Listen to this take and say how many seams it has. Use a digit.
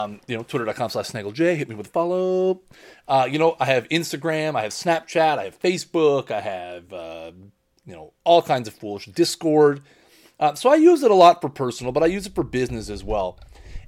0